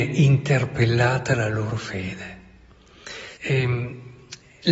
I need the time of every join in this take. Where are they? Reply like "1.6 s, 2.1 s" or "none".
3.3 s